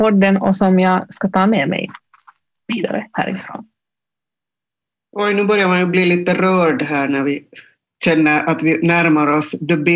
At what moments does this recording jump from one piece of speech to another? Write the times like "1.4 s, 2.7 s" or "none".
none